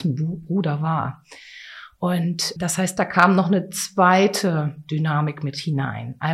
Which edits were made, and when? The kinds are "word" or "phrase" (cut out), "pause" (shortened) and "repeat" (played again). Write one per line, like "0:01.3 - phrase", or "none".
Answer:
0:02.6 - word